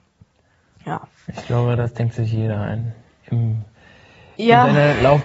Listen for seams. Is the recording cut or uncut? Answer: uncut